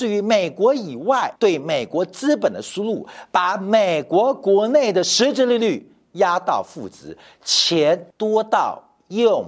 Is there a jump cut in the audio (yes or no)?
yes